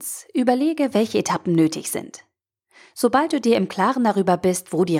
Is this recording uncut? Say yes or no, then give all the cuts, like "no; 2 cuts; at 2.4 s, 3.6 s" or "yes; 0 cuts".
yes; 0 cuts